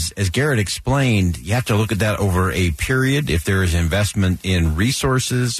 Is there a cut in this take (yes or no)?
no